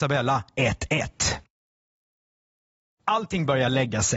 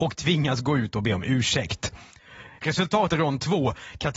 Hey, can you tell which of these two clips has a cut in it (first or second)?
second